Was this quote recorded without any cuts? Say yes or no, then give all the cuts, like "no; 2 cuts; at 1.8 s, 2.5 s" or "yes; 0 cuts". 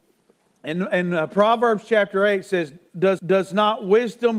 no; 1 cut; at 3.2 s